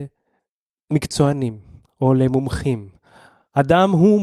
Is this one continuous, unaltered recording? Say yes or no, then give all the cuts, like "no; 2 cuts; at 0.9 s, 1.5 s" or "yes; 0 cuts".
yes; 0 cuts